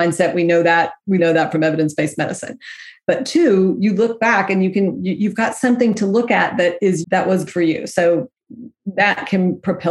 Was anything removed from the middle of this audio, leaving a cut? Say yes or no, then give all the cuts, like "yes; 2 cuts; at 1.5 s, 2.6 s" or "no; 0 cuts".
yes; 3 cuts; at 1.2 s, 7.0 s, 7.5 s